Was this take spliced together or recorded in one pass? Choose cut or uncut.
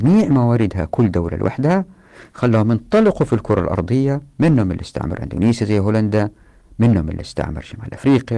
uncut